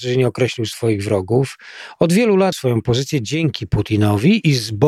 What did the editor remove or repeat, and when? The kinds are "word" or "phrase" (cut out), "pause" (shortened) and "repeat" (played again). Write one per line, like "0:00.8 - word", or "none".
0:02.5 - word